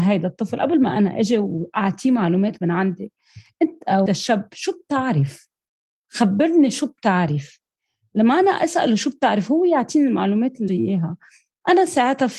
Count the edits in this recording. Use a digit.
2